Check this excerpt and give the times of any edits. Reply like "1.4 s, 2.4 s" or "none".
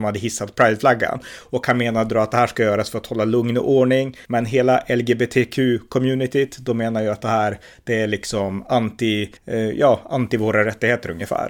4.2 s, 9.4 s